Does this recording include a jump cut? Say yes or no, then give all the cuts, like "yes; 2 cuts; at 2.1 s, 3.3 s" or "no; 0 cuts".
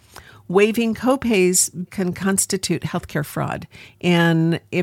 yes; 1 cut; at 1.9 s